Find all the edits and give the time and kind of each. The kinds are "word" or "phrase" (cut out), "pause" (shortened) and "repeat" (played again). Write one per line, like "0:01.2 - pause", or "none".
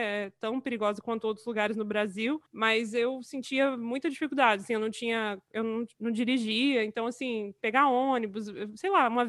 0:02.5 - pause